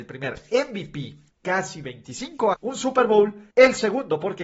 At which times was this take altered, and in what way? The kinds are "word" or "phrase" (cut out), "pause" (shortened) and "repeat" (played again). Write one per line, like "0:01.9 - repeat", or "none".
0:01.3 - word
0:02.5 - phrase
0:03.5 - pause